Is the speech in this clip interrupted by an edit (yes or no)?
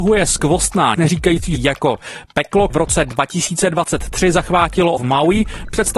yes